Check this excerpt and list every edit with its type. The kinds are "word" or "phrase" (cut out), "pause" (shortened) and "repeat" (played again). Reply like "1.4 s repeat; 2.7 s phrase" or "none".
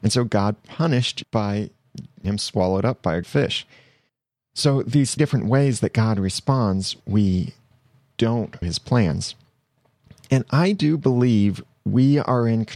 1.2 s word; 2.2 s word; 3.2 s word; 5.2 s word; 7.0 s word; 8.6 s word